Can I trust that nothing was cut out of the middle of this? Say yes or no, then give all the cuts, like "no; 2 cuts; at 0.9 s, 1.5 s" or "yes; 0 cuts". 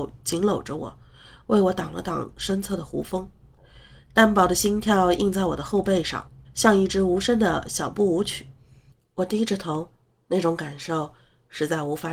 no; 1 cut; at 6.4 s